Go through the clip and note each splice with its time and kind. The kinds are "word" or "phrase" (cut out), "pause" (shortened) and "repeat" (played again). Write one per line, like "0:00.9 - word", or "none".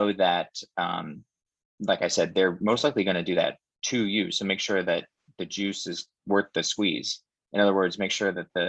none